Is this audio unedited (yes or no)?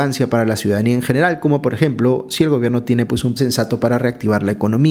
no